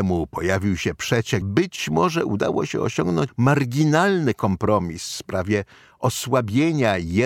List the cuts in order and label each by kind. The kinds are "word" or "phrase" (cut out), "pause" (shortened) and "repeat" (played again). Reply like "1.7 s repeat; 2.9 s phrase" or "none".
1.4 s word; 3.3 s word

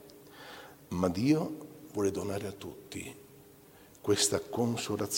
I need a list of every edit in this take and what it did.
none

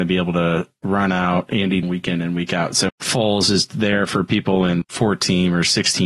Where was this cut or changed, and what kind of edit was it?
1.8 s word; 2.9 s word; 4.8 s word

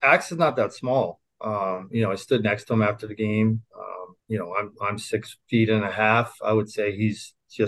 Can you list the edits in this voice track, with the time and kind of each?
4.2 s pause; 5.4 s pause

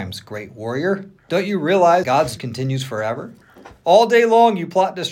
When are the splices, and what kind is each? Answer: 1.2 s pause; 2.0 s word; 2.4 s word

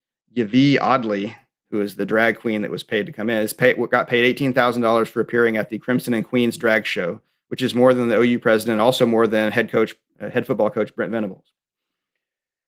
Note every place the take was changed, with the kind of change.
none

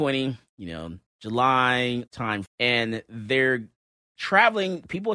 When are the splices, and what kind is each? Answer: 2.1 s word; 2.4 s word

